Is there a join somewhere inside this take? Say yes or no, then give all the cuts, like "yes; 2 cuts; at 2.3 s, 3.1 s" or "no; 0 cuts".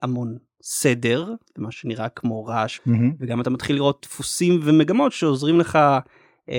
yes; 2 cuts; at 2.8 s, 4.0 s